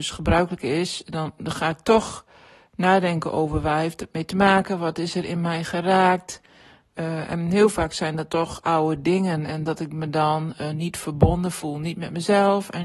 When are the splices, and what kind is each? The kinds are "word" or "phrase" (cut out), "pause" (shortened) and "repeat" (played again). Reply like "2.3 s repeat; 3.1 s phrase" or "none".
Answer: none

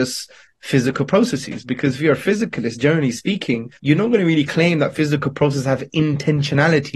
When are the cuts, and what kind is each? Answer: 3.8 s pause

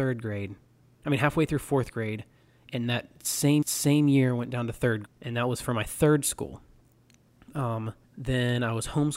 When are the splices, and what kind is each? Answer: 3.6 s repeat; 5.0 s word; 8.0 s pause

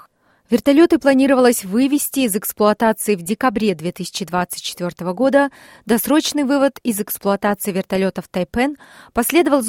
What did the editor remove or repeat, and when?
none

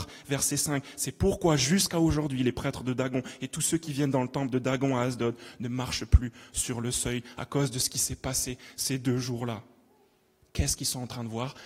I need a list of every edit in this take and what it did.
none

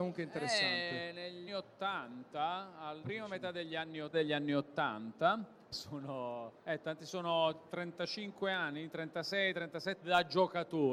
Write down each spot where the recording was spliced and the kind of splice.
1.5 s word; 3.0 s word; 4.1 s phrase; 5.7 s phrase; 6.6 s pause; 10.0 s word

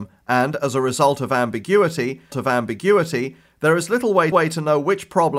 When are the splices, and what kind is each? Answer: 2.3 s repeat; 4.3 s repeat

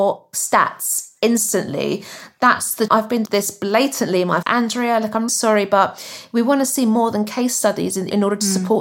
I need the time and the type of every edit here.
2.9 s word; 3.2 s word; 4.4 s word; 5.3 s word

